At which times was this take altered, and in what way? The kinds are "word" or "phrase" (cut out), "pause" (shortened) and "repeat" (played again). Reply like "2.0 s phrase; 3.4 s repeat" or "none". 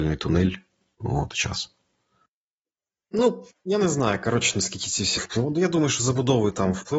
1.3 s phrase; 3.5 s pause; 5.2 s word

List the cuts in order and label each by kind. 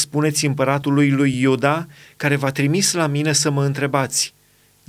none

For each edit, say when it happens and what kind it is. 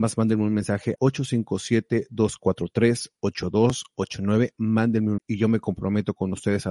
1.0 s word; 5.2 s word

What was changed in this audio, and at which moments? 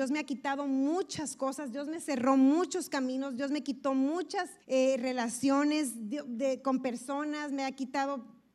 4.6 s pause

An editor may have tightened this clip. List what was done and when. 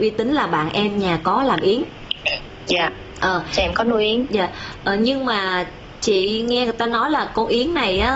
none

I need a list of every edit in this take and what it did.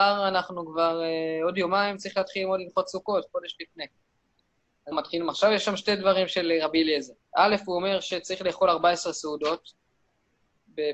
4.9 s phrase; 7.2 s pause

